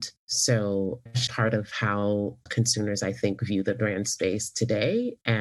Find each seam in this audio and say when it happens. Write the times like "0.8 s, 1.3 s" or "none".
1.3 s